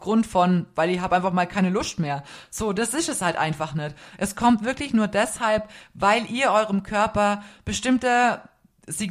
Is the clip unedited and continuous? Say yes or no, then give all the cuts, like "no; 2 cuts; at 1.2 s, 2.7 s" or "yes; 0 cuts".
yes; 0 cuts